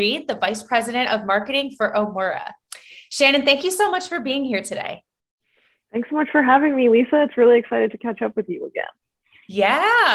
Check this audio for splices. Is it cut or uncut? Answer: uncut